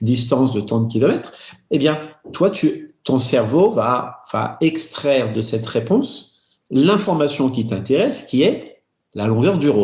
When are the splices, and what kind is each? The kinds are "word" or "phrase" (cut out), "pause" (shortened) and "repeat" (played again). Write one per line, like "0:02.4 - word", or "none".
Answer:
none